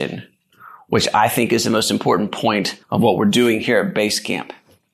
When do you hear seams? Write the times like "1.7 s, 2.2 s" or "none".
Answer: 2.8 s